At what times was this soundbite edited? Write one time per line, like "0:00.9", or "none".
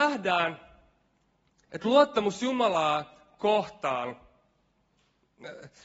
none